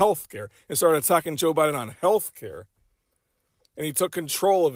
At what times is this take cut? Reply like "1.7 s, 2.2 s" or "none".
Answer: none

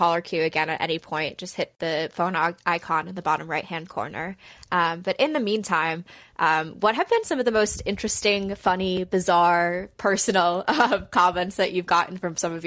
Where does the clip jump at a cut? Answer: none

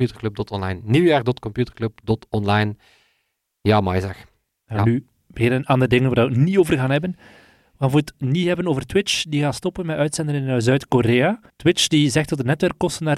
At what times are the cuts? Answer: 11.5 s

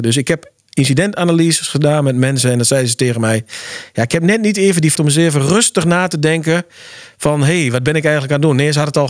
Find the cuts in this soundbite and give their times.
4.9 s

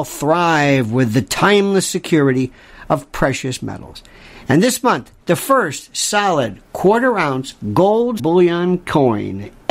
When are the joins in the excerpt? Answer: 5.2 s, 8.2 s

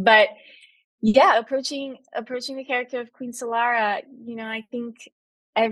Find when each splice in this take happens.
none

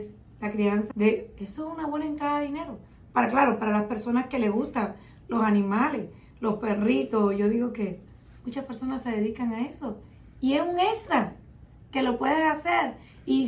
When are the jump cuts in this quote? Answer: 0.9 s

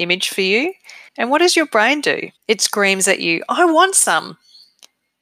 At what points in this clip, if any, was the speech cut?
1.1 s, 2.4 s

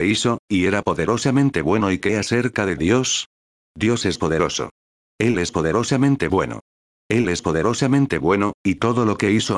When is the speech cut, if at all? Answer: none

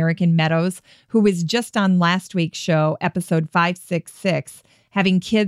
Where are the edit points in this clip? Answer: none

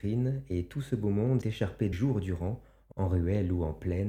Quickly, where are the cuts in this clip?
1.4 s, 1.9 s, 2.9 s

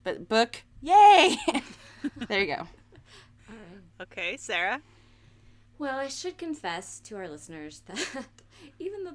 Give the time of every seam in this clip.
5.7 s

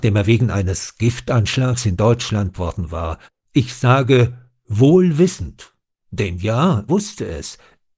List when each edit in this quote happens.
2.5 s, 3.3 s, 6.9 s

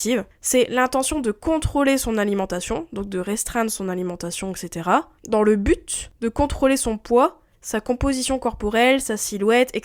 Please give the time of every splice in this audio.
none

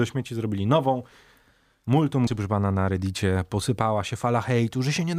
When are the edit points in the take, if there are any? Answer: 2.3 s

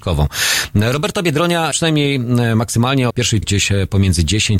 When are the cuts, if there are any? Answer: 1.7 s, 3.1 s, 3.4 s

